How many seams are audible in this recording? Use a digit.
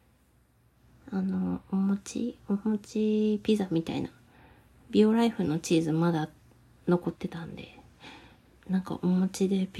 0